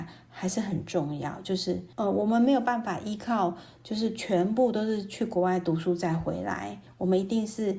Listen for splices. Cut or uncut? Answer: cut